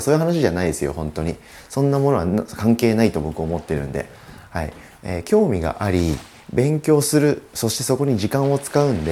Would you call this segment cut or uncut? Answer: uncut